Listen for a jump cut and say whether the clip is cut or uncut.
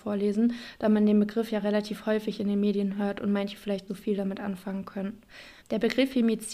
cut